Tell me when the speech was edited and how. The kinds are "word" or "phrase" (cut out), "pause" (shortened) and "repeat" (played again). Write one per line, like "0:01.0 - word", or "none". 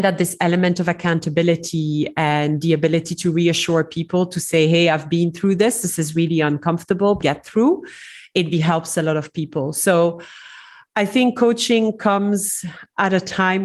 0:07.2 - phrase
0:08.5 - word

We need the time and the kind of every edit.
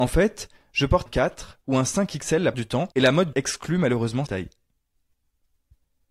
0:01.1 - word
0:02.5 - word
0:02.9 - pause
0:03.3 - word
0:04.3 - word

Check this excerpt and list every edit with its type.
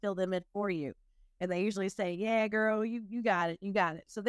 none

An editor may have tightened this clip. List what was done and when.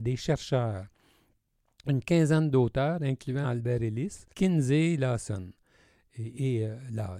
0:03.4 - word
0:04.3 - pause

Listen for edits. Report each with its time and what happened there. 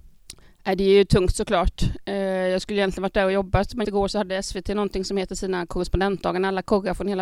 0:03.8 - word

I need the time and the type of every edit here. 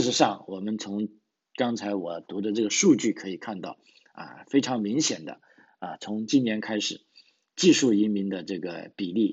none

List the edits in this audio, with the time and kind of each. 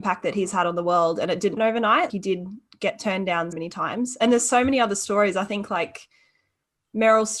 0:01.6 - word
0:02.1 - word
0:03.5 - word

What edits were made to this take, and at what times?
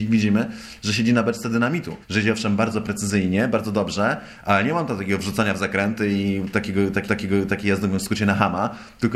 0:02.0 - pause
0:07.1 - repeat

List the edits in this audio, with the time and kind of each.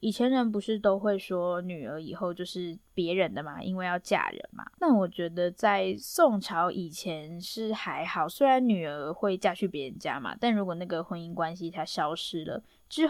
0:02.8 - pause
0:04.7 - pause

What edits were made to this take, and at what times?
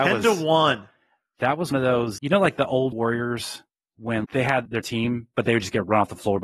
0:01.7 - word
0:02.2 - word
0:02.9 - word
0:04.2 - word
0:04.7 - word

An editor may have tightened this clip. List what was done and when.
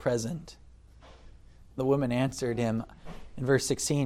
0:01.8 - word

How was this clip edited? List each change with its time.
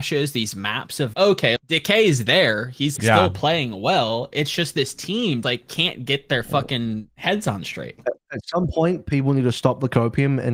0:01.1 - word
0:01.6 - word
0:03.0 - word
0:05.4 - word

